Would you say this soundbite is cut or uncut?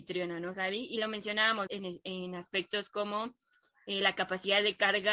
cut